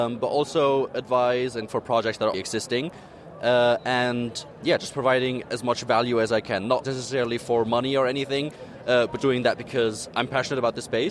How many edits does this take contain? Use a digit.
4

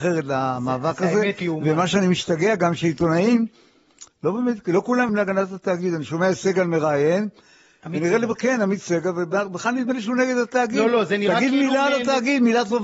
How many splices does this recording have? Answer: 2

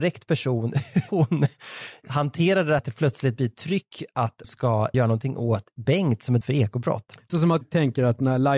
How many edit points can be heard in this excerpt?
8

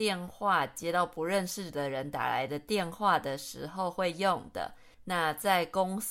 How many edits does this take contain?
1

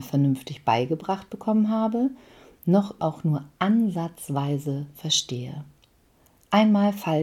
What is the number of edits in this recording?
1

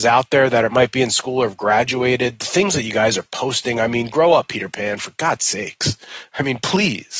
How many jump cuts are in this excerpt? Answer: 0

